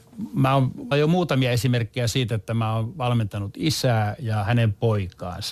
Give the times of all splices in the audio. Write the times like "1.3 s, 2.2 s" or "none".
0.9 s